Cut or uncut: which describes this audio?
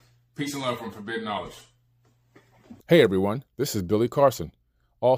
cut